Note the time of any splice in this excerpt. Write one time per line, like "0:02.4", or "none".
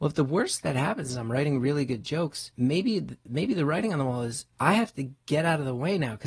0:02.5
0:04.5